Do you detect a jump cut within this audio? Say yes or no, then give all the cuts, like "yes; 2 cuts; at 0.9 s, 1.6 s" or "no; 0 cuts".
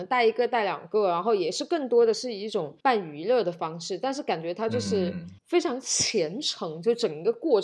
yes; 2 cuts; at 2.8 s, 5.4 s